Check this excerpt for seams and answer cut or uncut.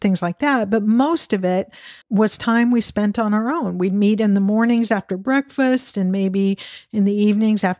cut